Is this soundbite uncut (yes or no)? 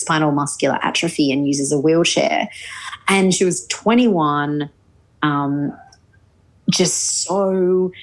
yes